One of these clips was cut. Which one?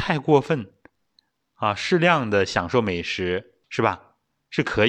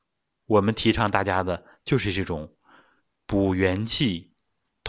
first; 1 cut; at 3.6 s

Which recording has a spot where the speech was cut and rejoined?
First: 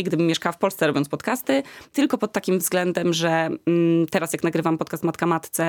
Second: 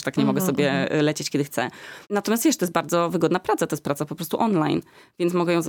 second; 1 cut; at 2.0 s

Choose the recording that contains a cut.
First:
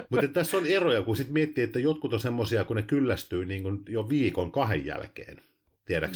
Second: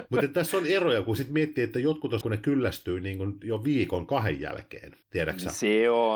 second; 2 cuts; at 2.2 s, 5.0 s

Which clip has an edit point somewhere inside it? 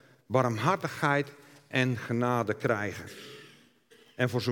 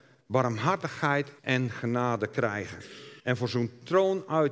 second; 2 cuts; at 1.4 s, 3.2 s

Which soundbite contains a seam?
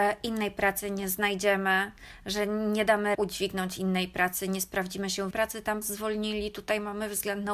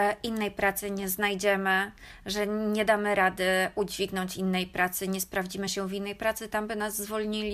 first; 3 cuts; at 3.1 s, 5.3 s, 5.8 s

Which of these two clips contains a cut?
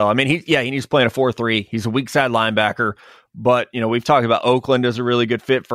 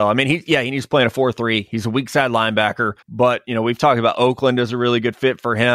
second; 1 cut; at 3.0 s

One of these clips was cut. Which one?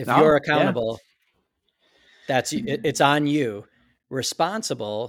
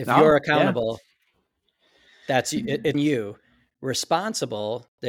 second; 1 cut; at 2.9 s

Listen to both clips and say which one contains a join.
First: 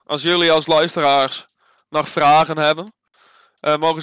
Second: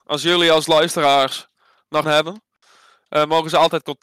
second; 1 cut; at 2.0 s

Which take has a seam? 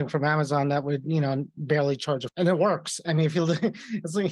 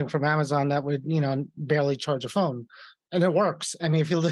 first; 1 cut; at 2.3 s

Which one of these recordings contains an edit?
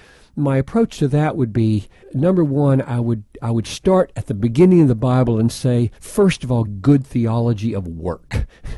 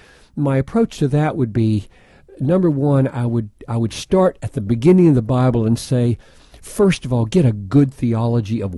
first; 3 cuts; at 2.0 s, 6.0 s, 6.7 s

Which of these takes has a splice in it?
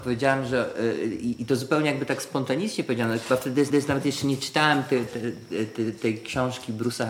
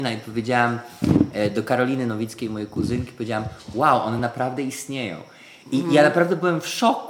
first; 2 cuts; at 3.7 s, 5.1 s

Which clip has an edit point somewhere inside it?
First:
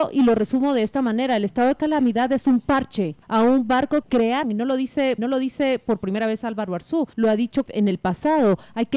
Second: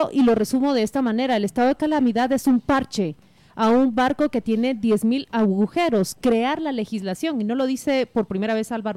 first; 6 cuts; at 3.2 s, 4.0 s, 4.4 s, 5.2 s, 7.1 s, 7.7 s

